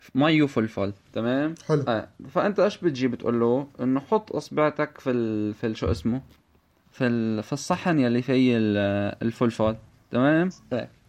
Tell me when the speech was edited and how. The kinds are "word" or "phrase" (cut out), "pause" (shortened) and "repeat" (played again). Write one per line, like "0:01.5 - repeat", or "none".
none